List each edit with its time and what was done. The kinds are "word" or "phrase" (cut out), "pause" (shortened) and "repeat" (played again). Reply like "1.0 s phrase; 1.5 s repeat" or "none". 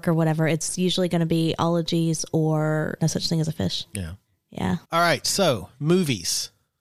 4.8 s pause